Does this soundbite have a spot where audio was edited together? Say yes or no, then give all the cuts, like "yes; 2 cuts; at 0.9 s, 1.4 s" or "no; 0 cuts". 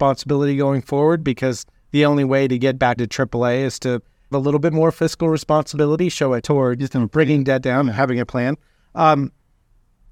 yes; 3 cuts; at 3.0 s, 4.3 s, 6.4 s